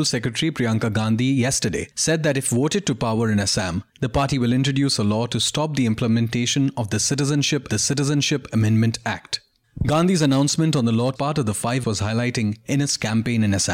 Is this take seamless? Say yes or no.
no